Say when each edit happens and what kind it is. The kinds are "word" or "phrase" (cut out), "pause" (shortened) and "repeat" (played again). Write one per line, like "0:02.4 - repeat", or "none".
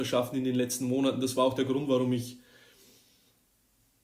none

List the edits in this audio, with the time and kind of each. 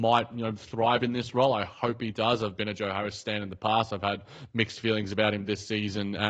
none

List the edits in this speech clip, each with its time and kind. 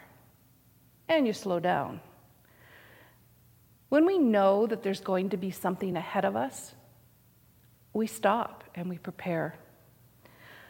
none

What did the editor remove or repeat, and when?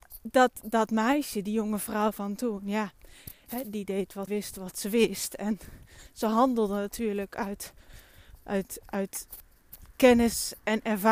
0:04.3 - phrase

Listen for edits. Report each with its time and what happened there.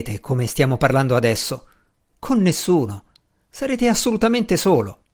none

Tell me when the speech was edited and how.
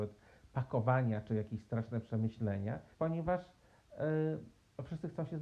0:02.9 - pause

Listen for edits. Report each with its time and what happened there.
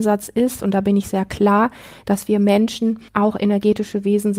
0:03.1 - pause

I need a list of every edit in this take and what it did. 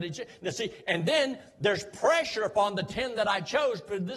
none

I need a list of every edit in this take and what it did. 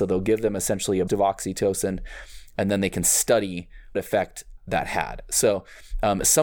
0:01.1 - word
0:03.9 - word
0:04.6 - word

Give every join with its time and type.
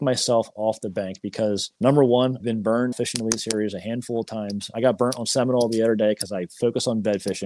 0:01.7 - pause
0:02.4 - word
0:02.9 - word

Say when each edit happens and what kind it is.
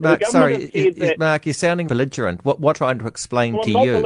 0:01.9 - word
0:02.7 - word

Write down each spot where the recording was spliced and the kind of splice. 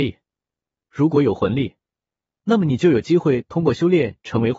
none

